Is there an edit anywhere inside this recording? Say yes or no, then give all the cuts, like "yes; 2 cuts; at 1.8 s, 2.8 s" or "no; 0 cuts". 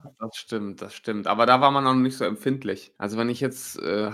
yes; 1 cut; at 3.0 s